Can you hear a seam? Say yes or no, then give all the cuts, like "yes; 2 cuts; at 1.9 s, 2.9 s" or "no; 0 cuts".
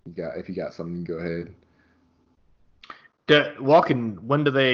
no; 0 cuts